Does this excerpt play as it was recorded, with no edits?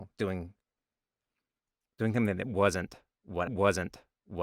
no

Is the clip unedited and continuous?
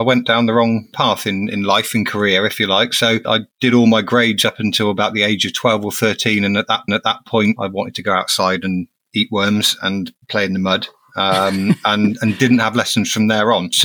no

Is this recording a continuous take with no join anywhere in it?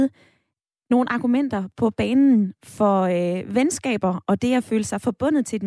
yes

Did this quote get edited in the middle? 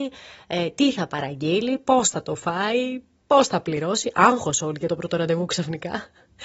no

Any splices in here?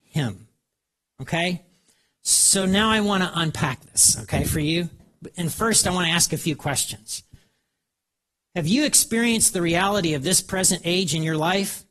no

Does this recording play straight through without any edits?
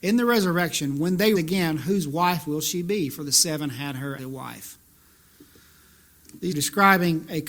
no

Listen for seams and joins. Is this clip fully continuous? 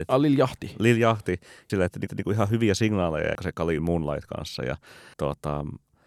no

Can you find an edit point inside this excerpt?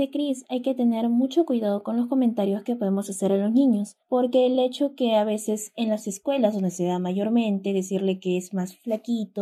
no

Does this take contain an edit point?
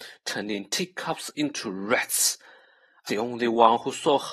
yes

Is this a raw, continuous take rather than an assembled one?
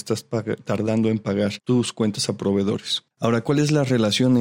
no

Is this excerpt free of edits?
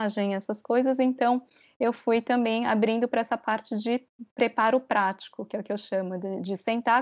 yes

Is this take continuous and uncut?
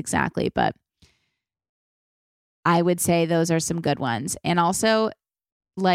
yes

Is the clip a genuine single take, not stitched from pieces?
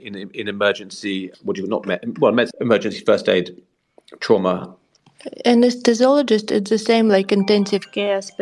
yes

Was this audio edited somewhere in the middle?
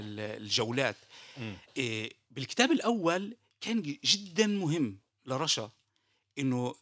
no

